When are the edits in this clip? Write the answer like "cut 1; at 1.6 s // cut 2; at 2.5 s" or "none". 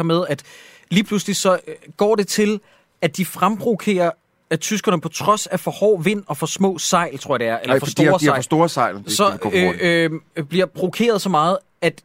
none